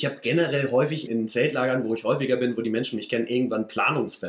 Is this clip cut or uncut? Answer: cut